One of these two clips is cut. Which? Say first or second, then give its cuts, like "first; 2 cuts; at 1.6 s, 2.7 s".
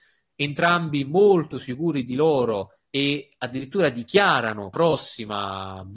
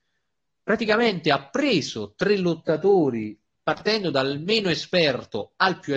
first; 2 cuts; at 2.9 s, 4.7 s